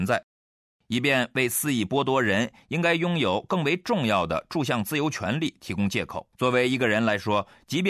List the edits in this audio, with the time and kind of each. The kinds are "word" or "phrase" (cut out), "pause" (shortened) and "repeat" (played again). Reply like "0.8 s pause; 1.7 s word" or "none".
6.3 s pause